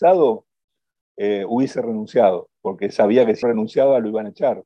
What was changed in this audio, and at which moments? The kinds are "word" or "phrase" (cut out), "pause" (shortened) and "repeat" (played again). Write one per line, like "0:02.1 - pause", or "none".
0:02.6 - pause
0:03.4 - word